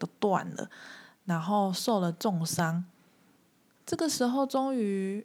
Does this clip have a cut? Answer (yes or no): no